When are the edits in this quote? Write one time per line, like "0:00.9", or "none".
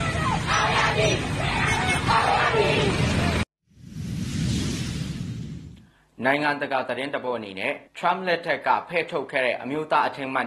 0:07.9